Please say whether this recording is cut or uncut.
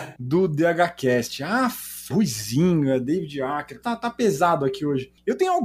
cut